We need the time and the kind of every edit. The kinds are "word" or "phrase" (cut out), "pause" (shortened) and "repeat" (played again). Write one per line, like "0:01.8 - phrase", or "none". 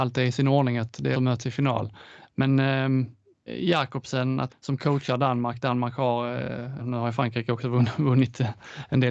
0:01.1 - word
0:03.5 - word
0:04.5 - phrase
0:06.8 - word